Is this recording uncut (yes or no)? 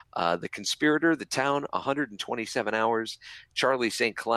yes